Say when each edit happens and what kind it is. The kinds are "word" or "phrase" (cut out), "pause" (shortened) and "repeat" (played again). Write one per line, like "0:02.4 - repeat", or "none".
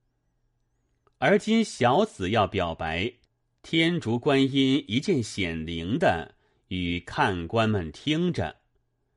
none